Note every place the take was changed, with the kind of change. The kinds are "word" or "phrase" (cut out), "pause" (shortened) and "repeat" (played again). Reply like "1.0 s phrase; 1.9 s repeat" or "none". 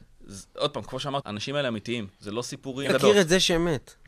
1.2 s word; 2.9 s word